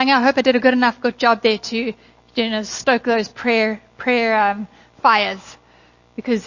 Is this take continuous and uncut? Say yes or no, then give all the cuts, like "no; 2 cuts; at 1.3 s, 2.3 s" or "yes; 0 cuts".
yes; 0 cuts